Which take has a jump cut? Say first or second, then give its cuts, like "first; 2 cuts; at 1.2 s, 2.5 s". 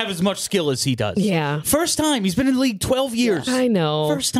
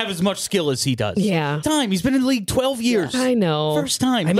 second; 1 cut; at 1.6 s